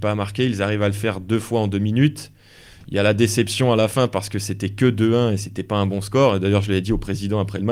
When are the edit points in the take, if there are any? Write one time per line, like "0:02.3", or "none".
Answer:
none